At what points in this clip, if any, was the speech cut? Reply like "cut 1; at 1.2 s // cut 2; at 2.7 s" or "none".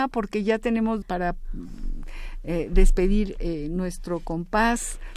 cut 1; at 1.0 s

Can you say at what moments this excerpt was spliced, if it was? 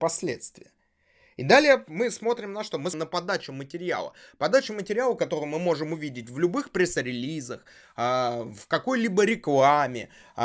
cut 1; at 2.9 s

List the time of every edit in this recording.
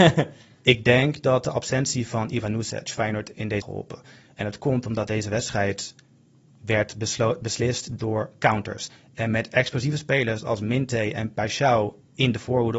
cut 1; at 3.6 s

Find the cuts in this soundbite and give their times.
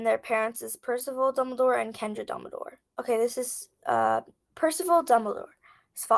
cut 1; at 2.9 s

